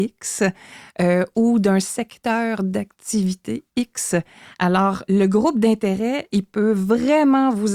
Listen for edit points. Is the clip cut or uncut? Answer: cut